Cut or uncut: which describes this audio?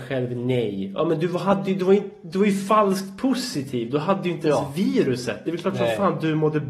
uncut